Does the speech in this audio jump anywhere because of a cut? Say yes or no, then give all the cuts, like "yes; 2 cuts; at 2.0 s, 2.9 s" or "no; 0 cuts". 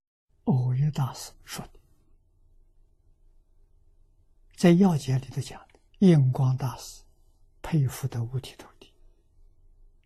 yes; 2 cuts; at 4.6 s, 5.9 s